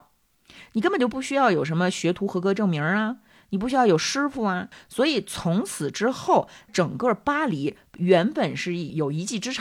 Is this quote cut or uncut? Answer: uncut